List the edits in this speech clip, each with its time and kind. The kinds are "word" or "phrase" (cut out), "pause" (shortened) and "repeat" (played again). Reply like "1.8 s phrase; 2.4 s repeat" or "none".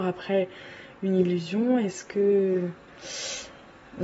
none